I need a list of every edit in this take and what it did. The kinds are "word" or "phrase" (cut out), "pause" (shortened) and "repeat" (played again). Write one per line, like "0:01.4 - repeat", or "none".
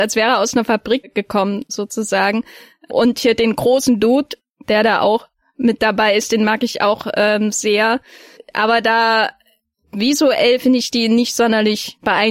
0:01.7 - word